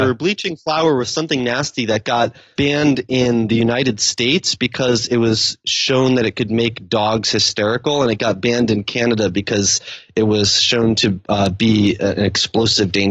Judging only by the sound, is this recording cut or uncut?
uncut